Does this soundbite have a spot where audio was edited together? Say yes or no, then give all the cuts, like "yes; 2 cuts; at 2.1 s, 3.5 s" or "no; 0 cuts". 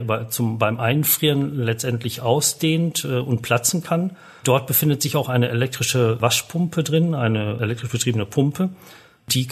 no; 0 cuts